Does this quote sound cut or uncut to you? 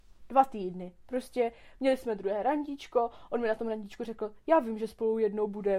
uncut